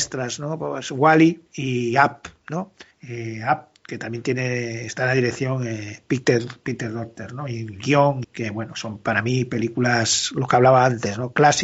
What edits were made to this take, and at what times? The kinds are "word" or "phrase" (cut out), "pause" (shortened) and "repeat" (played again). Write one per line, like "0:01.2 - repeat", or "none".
0:01.5 - pause
0:02.9 - pause
0:08.2 - word